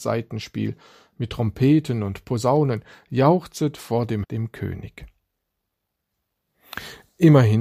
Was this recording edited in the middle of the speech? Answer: yes; 1 cut; at 4.2 s

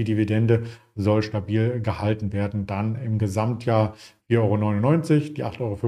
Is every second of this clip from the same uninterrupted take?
yes; 0 cuts

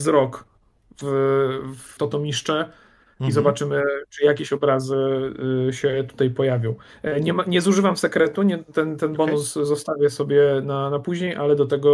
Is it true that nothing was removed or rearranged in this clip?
no; 1 cut; at 2.0 s

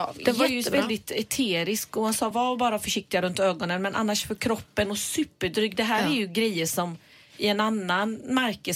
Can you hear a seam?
no; 0 cuts

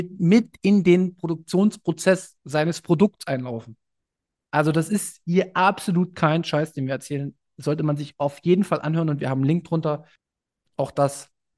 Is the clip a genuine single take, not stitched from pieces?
yes; 0 cuts

